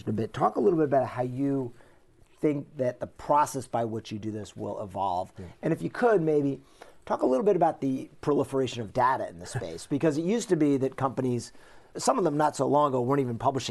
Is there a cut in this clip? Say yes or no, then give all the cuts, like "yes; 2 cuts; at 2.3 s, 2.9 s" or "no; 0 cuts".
no; 0 cuts